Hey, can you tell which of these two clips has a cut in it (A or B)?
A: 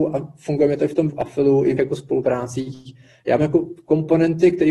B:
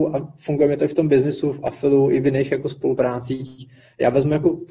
A